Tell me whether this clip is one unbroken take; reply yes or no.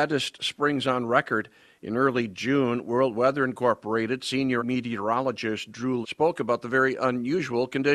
no